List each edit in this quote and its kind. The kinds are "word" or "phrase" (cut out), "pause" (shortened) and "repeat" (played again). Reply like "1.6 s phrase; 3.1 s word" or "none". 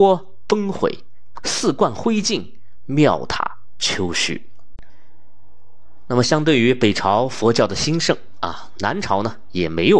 1.4 s phrase